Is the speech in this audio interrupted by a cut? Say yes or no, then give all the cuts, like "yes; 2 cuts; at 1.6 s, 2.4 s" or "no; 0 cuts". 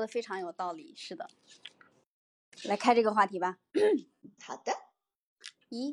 yes; 2 cuts; at 2.6 s, 4.4 s